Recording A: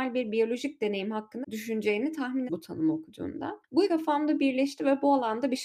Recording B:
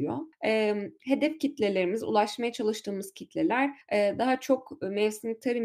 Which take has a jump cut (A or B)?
A